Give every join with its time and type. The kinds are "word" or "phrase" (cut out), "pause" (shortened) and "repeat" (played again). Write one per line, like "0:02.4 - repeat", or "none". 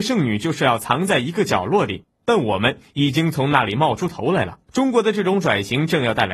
0:04.7 - pause